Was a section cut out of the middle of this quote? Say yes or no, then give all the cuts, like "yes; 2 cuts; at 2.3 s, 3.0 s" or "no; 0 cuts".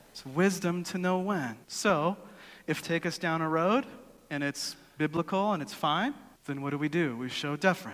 yes; 3 cuts; at 1.6 s, 2.8 s, 6.3 s